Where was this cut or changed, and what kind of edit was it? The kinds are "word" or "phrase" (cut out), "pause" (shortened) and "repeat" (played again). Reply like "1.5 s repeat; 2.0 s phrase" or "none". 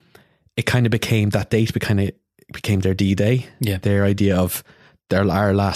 none